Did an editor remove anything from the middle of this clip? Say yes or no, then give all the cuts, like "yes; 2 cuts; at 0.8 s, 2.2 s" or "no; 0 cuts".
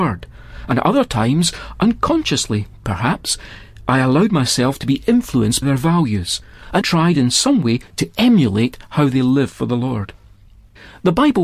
yes; 2 cuts; at 5.6 s, 6.8 s